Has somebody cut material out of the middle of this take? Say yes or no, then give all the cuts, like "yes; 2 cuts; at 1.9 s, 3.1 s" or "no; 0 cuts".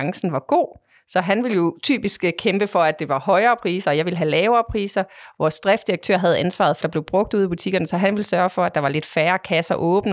yes; 1 cut; at 6.8 s